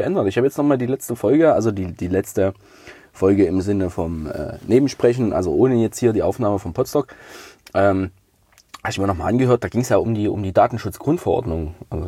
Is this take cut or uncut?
uncut